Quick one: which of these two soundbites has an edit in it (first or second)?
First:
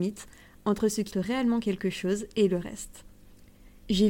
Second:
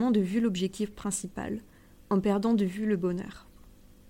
first